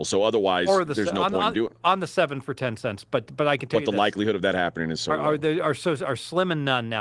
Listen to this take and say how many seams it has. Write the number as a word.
one